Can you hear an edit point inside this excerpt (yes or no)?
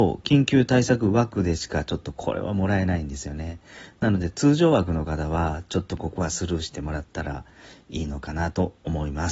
no